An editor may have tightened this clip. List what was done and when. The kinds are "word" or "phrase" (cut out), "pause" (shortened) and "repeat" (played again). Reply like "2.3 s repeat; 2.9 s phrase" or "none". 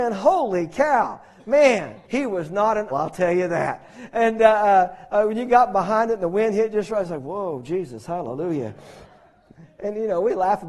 2.0 s pause; 2.9 s word; 9.1 s pause